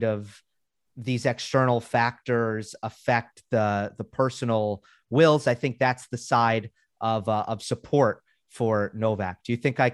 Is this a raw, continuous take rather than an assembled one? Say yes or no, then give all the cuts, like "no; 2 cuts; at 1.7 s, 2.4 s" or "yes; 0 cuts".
yes; 0 cuts